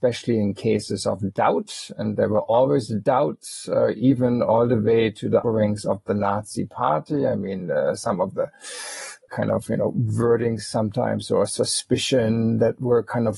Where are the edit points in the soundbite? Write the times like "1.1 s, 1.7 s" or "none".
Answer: 5.4 s